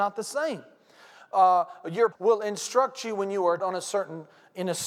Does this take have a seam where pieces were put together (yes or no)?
yes